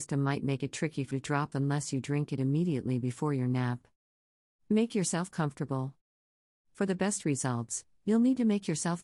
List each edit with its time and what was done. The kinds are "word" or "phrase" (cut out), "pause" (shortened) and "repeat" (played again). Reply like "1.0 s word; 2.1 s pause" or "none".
1.1 s word; 1.5 s word